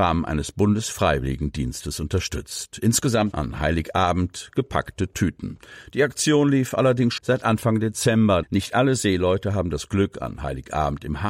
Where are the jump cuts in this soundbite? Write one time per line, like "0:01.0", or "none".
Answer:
0:03.3
0:07.2
0:08.4